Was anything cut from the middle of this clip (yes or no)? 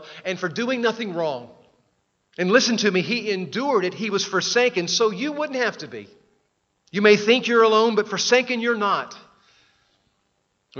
yes